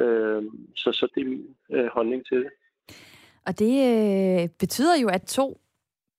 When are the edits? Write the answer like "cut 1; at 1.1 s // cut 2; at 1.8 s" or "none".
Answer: cut 1; at 1.1 s // cut 2; at 5.2 s

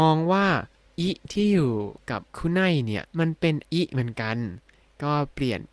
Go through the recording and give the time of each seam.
cut 1; at 2.3 s // cut 2; at 3.1 s // cut 3; at 3.6 s

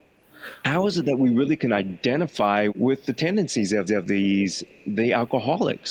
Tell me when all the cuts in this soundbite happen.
cut 1; at 2.7 s // cut 2; at 3.9 s

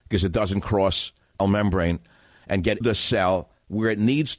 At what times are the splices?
cut 1; at 1.4 s // cut 2; at 2.8 s

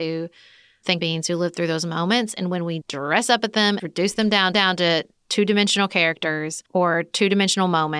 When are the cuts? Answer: cut 1; at 1.0 s // cut 2; at 2.8 s // cut 3; at 3.8 s // cut 4; at 4.5 s // cut 5; at 6.7 s

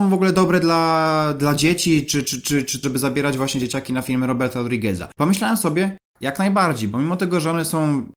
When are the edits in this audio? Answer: cut 1; at 2.8 s

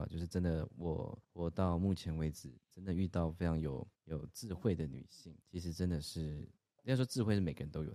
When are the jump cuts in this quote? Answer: cut 1; at 1.2 s // cut 2; at 3.9 s // cut 3; at 5.4 s

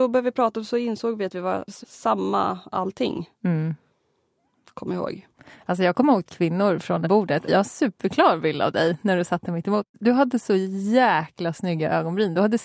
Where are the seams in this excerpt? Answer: cut 1; at 1.8 s // cut 2; at 6.3 s // cut 3; at 7.0 s

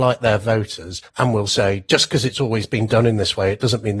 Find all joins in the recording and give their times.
cut 1; at 1.1 s

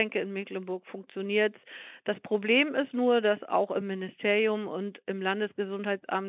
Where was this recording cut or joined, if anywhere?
none

